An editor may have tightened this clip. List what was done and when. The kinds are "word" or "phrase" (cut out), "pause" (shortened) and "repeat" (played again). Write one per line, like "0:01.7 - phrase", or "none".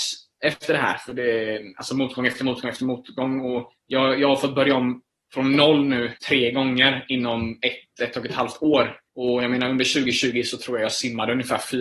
0:03.8 - pause
0:06.2 - pause
0:09.1 - pause